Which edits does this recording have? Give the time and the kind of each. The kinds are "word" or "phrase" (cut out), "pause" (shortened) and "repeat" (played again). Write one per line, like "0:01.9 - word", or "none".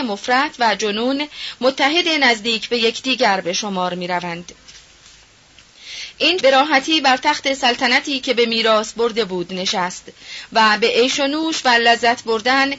0:06.4 - word